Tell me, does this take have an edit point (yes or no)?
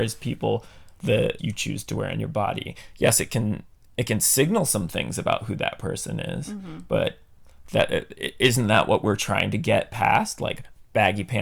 yes